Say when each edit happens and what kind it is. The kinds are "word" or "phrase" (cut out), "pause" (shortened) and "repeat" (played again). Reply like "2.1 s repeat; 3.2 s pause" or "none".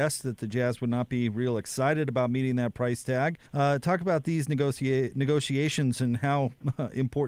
3.5 s pause